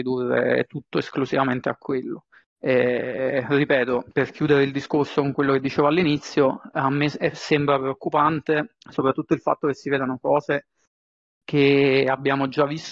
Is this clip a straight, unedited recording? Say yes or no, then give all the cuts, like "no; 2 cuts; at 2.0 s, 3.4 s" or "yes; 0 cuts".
no; 2 cuts; at 4.1 s, 8.8 s